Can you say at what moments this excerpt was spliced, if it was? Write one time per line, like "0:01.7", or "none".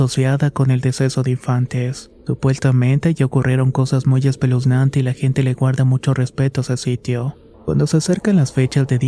0:02.2
0:07.5